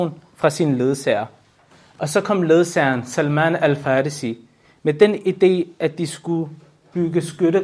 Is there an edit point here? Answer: no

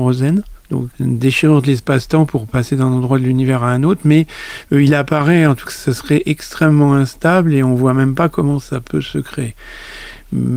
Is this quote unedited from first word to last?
no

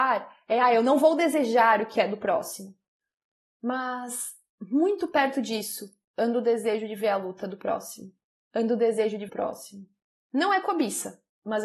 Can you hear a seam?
yes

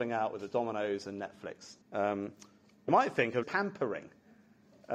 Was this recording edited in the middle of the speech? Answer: yes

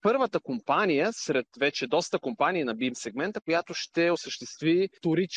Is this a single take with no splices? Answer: yes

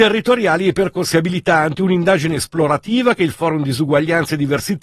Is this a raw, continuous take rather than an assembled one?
yes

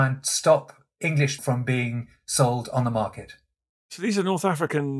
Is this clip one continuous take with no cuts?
no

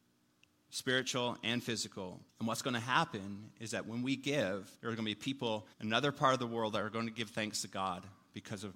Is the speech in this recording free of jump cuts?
no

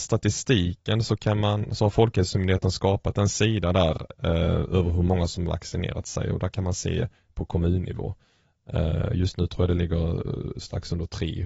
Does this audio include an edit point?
no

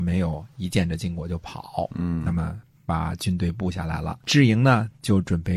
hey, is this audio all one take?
yes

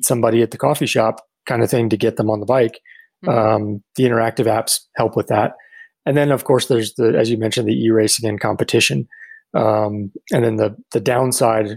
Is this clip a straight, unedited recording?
yes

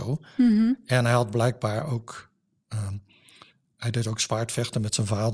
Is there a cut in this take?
no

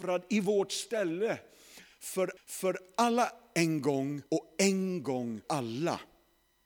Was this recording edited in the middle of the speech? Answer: yes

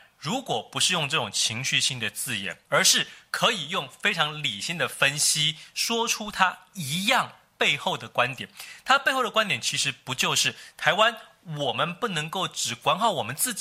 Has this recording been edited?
yes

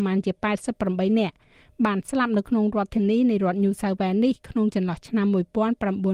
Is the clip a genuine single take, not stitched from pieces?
yes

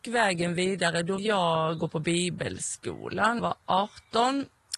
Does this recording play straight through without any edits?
no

